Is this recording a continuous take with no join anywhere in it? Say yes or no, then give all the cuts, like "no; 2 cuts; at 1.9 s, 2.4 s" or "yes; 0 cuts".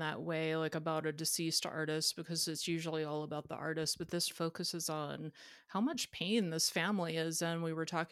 no; 1 cut; at 4.3 s